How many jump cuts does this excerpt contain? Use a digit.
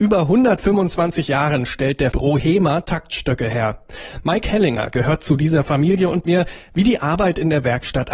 2